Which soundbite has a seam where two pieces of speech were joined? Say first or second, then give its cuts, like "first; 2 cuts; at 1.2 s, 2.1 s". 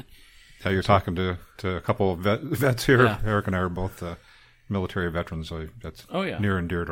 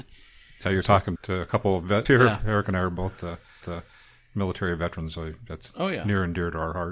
second; 3 cuts; at 1.2 s, 2.0 s, 3.6 s